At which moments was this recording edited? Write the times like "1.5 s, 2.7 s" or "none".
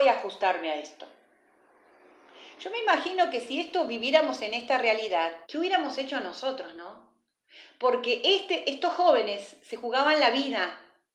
5.4 s